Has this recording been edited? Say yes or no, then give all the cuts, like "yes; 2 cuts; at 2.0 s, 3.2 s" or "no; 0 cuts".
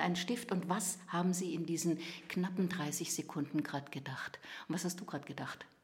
no; 0 cuts